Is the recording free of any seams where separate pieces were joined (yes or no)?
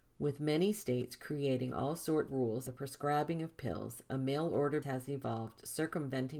no